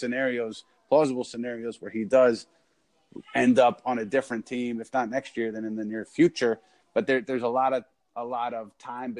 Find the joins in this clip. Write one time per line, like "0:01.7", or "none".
none